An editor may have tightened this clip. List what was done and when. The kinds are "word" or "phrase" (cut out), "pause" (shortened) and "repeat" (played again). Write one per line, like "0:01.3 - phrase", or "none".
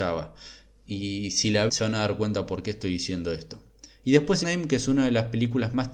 0:01.7 - word
0:04.4 - phrase